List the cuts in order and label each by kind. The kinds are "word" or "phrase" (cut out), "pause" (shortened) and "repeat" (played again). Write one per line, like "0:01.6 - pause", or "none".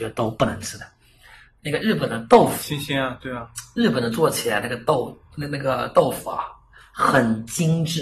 none